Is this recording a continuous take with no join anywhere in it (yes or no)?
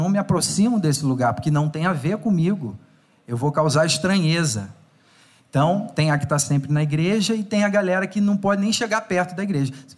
no